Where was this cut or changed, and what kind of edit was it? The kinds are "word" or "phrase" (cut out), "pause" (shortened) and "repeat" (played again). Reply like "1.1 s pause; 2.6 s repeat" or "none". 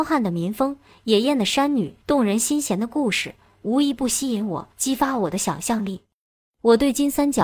2.0 s pause; 4.7 s pause